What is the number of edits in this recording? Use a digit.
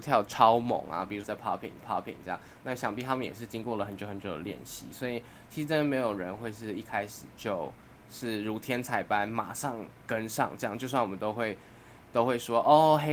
4